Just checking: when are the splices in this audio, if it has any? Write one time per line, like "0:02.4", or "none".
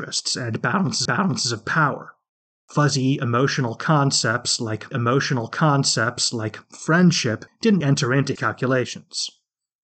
0:01.0
0:04.9
0:07.8
0:08.4

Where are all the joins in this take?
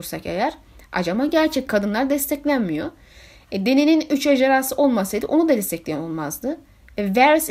none

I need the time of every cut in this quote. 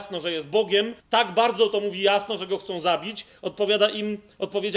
0:01.0

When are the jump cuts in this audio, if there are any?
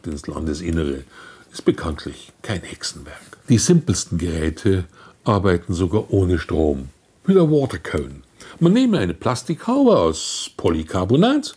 none

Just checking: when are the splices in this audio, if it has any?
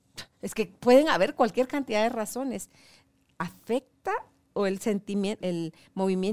0:05.4

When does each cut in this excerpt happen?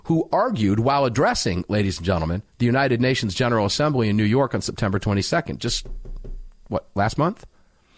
0:02.5

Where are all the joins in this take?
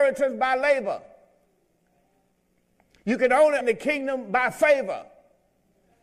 0:03.6

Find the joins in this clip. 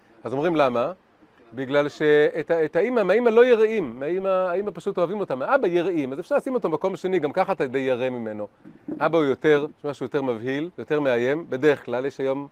0:09.7
0:10.7

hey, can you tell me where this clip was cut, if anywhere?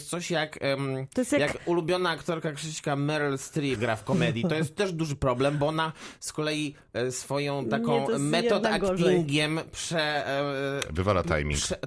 0:03.8

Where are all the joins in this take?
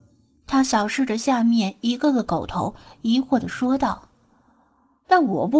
none

